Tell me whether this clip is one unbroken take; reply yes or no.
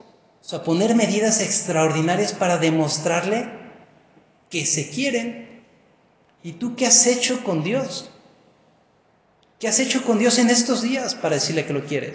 yes